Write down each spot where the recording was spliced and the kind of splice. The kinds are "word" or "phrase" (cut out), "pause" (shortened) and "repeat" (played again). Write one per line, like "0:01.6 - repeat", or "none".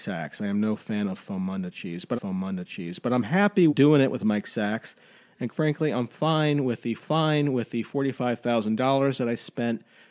0:02.2 - repeat
0:03.7 - word
0:05.5 - word
0:07.0 - repeat